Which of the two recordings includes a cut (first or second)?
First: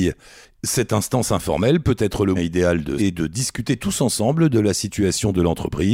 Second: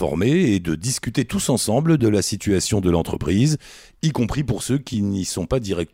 first